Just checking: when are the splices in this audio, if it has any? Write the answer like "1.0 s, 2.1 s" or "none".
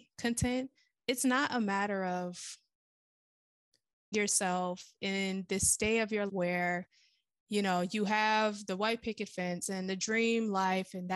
4.1 s, 6.3 s